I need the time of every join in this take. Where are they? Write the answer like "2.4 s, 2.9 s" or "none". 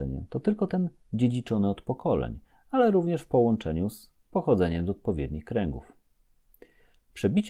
none